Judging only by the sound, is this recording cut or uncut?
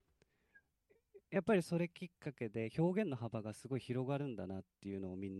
cut